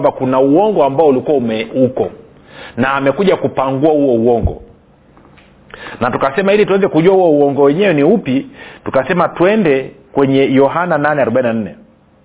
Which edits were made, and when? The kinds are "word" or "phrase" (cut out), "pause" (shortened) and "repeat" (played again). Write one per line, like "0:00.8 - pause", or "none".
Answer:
none